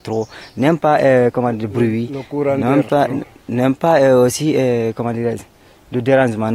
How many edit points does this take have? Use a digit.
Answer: 0